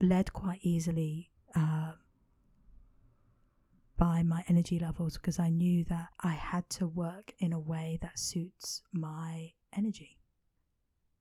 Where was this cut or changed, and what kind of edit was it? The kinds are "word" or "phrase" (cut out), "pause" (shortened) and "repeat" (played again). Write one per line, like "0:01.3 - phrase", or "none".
0:01.4 - pause
0:06.1 - pause